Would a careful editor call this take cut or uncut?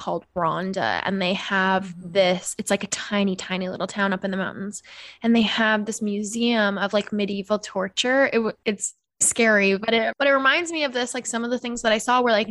cut